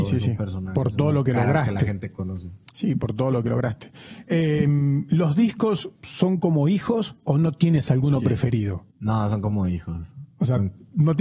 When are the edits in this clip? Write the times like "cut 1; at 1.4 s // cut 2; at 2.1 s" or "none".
cut 1; at 5.9 s // cut 2; at 7.2 s // cut 3; at 8.9 s